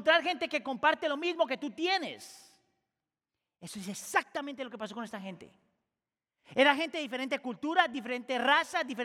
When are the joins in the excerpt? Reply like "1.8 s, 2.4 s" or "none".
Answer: none